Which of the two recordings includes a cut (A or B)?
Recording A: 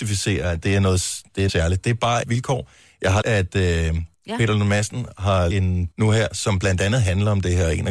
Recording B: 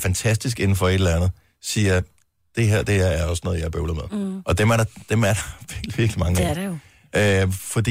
A